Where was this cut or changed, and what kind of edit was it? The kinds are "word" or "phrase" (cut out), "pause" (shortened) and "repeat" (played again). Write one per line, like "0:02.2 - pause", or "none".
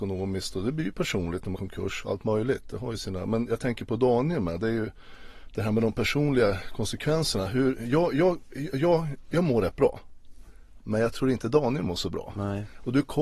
0:01.5 - word